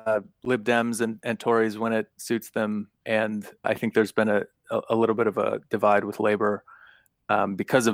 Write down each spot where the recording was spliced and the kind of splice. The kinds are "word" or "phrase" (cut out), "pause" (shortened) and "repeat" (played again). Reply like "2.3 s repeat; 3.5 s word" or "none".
3.6 s word